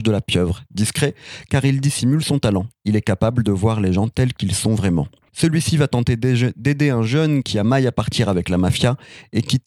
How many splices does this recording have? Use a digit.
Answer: 1